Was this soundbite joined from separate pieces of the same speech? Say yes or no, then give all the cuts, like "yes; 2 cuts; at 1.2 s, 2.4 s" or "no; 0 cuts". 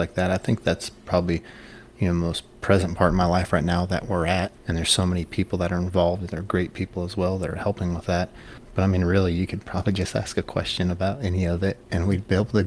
yes; 1 cut; at 4.6 s